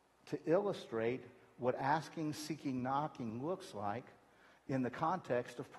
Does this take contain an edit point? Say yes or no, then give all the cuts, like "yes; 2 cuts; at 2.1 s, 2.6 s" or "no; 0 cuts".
no; 0 cuts